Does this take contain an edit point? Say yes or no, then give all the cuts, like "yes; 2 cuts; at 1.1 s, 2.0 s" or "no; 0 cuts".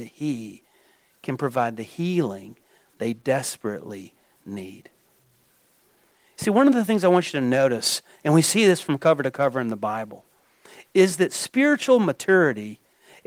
no; 0 cuts